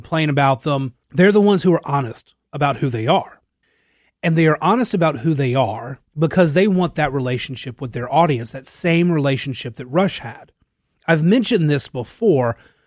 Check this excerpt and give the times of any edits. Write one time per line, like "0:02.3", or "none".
0:01.0
0:03.6
0:06.1